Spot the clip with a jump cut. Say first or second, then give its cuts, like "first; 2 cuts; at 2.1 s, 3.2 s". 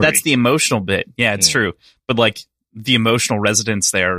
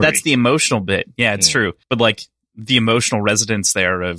second; 1 cut; at 1.8 s